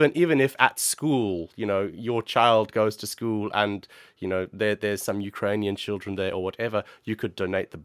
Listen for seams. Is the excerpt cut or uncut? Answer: uncut